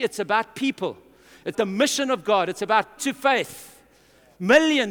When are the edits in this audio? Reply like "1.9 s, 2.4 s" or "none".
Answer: 1.5 s, 3.0 s